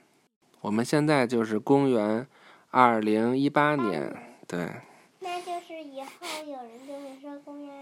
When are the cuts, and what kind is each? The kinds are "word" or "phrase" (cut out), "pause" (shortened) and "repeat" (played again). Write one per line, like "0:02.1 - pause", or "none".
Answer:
none